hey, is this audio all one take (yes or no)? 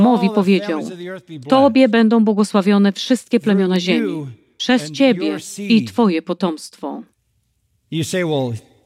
yes